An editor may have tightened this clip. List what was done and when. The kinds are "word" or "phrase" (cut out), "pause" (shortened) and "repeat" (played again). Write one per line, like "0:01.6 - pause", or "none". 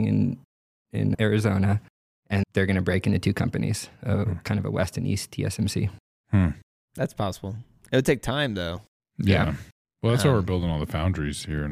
0:01.1 - word
0:02.4 - word